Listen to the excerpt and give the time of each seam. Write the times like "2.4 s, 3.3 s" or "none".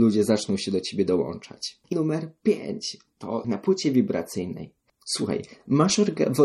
1.9 s, 3.4 s